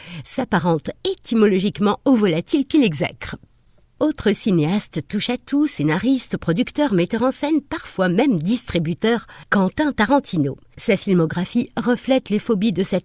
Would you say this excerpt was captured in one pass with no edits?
yes; 0 cuts

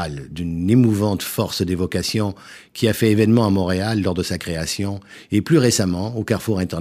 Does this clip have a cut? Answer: no; 0 cuts

